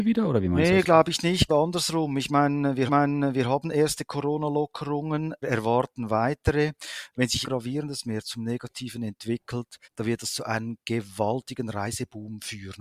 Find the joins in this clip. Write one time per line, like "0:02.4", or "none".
0:01.5
0:02.9
0:05.4
0:07.4
0:09.8